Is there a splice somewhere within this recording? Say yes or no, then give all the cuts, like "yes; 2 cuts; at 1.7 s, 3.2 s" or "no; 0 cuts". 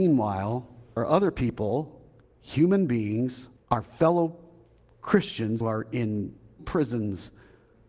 yes; 4 cuts; at 1.0 s, 3.6 s, 5.6 s, 6.6 s